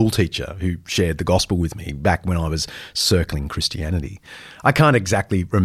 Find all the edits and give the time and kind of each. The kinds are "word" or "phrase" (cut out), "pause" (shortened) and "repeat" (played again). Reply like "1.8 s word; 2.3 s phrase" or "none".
none